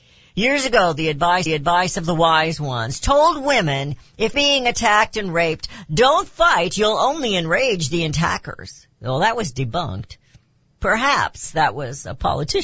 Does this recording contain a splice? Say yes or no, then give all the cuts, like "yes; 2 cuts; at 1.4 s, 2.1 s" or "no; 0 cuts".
yes; 3 cuts; at 1.5 s, 4.3 s, 8.9 s